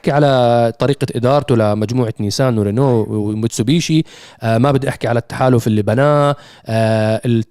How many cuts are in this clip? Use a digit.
0